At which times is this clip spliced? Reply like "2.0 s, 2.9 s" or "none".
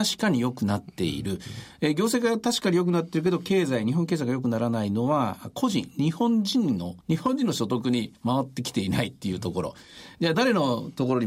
7.0 s, 10.3 s